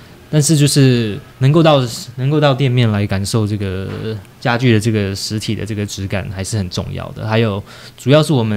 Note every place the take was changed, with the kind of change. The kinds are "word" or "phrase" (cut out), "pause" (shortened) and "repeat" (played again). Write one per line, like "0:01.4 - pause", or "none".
0:01.3 - pause
0:04.3 - pause